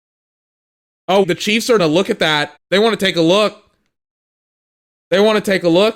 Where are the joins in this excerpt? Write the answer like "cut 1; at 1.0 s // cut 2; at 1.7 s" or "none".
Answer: cut 1; at 1.2 s // cut 2; at 1.8 s // cut 3; at 2.6 s

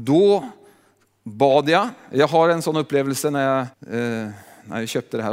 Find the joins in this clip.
cut 1; at 3.7 s

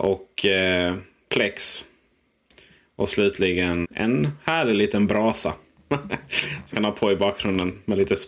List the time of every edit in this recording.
cut 1; at 3.8 s // cut 2; at 6.7 s

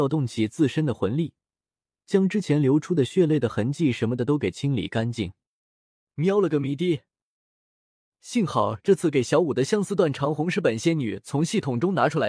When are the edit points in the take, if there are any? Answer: none

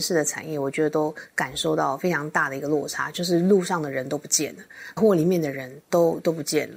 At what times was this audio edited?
cut 1; at 5.0 s // cut 2; at 5.8 s

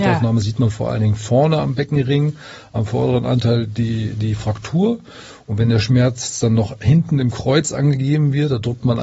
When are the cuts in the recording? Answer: none

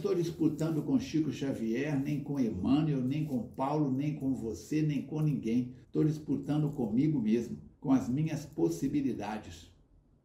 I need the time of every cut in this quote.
cut 1; at 5.8 s // cut 2; at 7.7 s

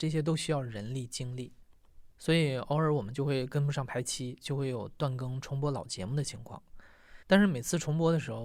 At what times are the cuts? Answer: cut 1; at 7.2 s

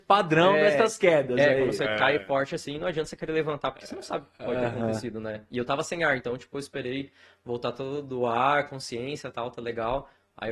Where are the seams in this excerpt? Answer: none

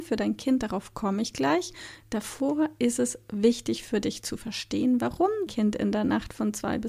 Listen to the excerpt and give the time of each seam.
cut 1; at 5.5 s

